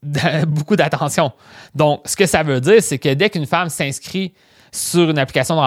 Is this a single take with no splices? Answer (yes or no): yes